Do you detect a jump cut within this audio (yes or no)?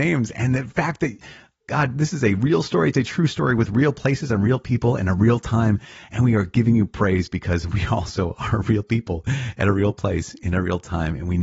no